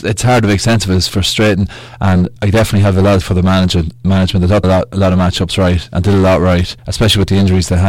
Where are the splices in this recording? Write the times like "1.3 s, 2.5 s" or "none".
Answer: 1.1 s, 2.4 s, 3.2 s, 4.6 s, 6.8 s